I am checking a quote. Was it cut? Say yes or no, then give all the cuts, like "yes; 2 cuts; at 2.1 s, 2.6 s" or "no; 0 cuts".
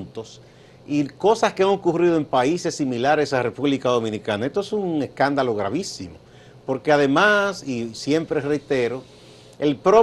no; 0 cuts